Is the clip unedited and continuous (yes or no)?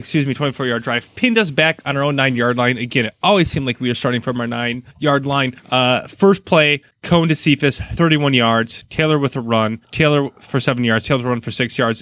no